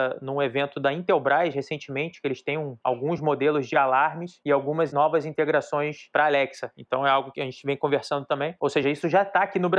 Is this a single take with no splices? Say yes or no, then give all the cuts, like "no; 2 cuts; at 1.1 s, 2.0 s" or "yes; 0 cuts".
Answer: yes; 0 cuts